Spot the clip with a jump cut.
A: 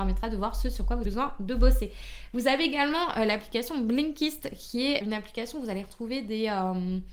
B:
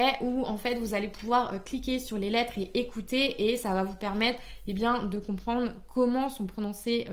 A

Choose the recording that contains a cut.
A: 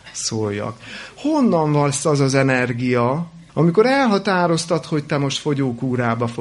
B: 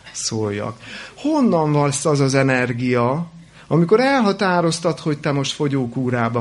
A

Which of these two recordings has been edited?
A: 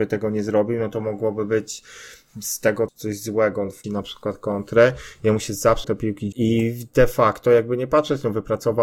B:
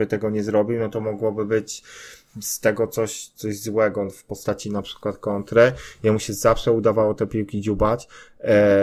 A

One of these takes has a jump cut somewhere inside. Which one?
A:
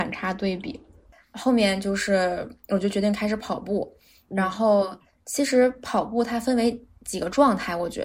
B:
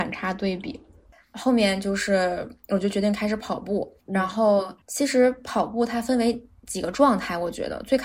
B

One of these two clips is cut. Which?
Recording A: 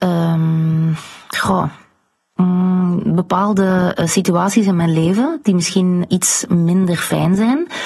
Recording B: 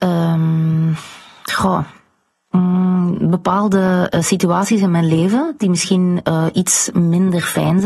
A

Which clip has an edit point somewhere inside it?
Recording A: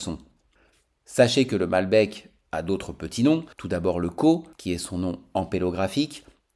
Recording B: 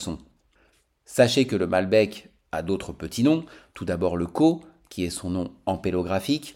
A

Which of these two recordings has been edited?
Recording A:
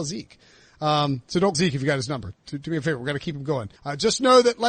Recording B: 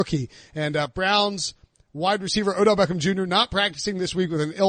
A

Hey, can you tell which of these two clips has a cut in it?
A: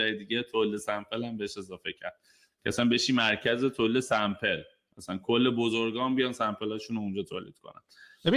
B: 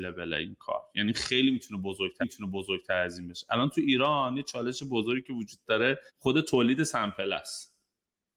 B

